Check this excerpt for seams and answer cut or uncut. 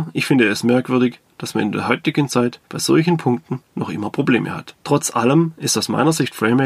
cut